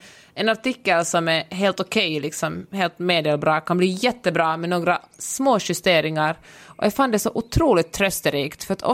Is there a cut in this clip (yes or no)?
no